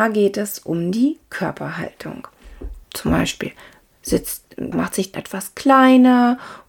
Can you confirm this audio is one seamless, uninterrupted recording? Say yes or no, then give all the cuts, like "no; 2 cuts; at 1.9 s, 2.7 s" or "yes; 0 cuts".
no; 3 cuts; at 2.8 s, 4.7 s, 5.1 s